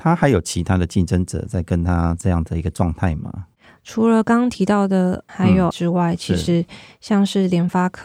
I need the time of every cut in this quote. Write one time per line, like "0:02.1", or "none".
0:02.2
0:05.3
0:05.7